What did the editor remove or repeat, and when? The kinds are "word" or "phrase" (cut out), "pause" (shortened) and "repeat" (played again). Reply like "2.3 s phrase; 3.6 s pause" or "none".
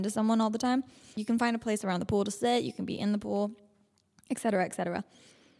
none